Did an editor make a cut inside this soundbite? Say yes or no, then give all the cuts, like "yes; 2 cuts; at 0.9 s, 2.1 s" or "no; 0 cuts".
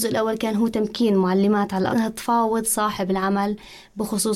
yes; 1 cut; at 1.9 s